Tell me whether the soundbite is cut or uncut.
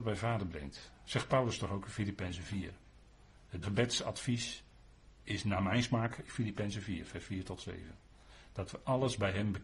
cut